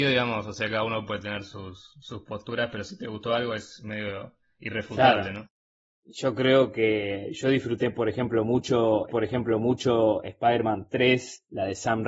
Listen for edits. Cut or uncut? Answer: cut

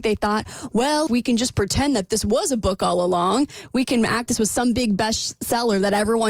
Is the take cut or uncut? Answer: cut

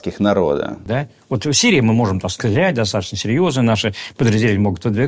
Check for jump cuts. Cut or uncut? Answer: uncut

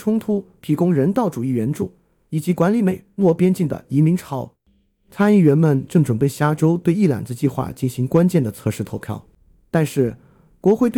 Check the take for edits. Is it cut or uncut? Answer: uncut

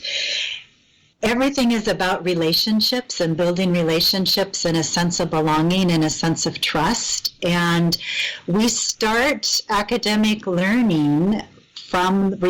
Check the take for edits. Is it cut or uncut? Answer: uncut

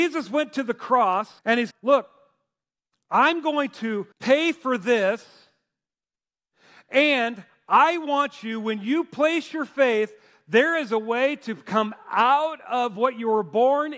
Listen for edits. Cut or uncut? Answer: cut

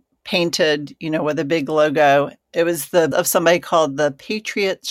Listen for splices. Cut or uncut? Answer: cut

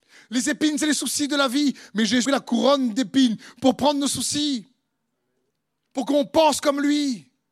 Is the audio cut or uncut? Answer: cut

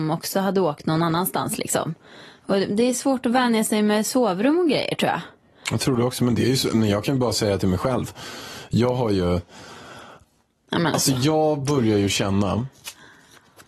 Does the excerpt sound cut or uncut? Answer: uncut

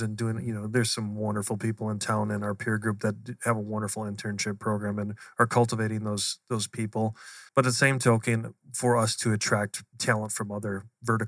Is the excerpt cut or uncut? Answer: cut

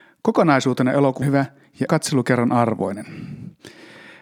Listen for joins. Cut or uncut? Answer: cut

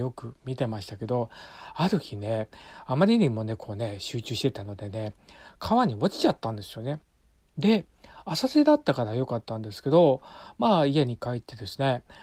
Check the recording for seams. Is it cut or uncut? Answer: uncut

